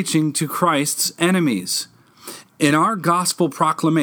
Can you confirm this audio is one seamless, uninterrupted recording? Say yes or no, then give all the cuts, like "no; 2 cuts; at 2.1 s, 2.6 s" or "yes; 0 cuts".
yes; 0 cuts